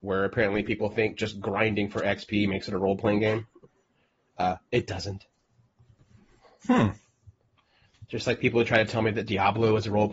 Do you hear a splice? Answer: no; 0 cuts

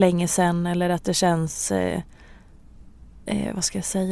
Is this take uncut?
yes; 0 cuts

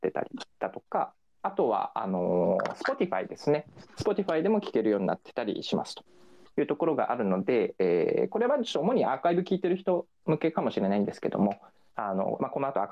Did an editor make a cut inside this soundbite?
no; 0 cuts

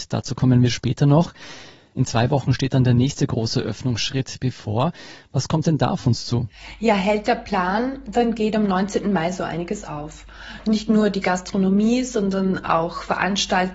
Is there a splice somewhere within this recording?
no; 0 cuts

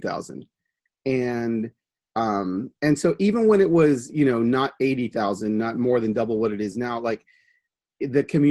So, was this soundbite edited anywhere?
no; 0 cuts

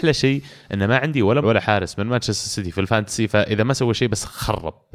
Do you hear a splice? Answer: yes; 1 cut; at 1.4 s

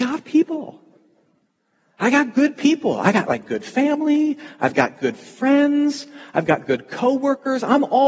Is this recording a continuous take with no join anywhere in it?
yes; 0 cuts

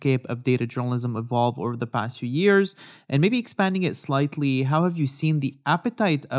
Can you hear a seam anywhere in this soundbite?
no; 0 cuts

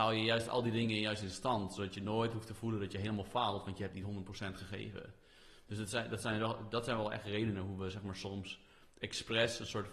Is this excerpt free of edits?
yes; 0 cuts

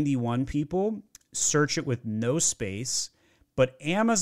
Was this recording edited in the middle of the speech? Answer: no; 0 cuts

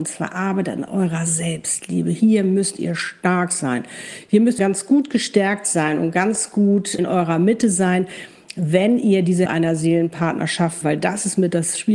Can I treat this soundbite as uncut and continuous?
no; 4 cuts; at 4.6 s, 7.0 s, 9.5 s, 10.8 s

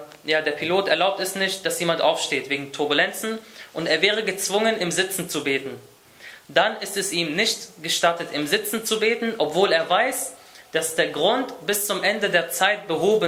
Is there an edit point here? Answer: no; 0 cuts

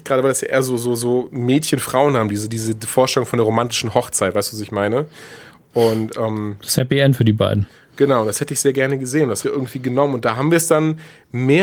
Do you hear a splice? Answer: yes; 1 cut; at 9.4 s

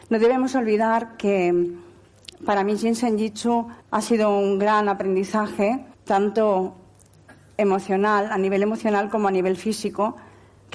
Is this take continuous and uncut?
no; 2 cuts; at 3.8 s, 5.9 s

